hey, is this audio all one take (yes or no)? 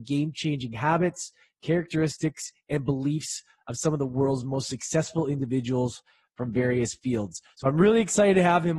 yes